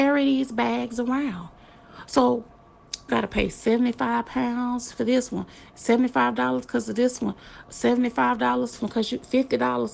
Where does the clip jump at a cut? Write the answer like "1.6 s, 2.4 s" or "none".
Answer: 3.1 s, 8.8 s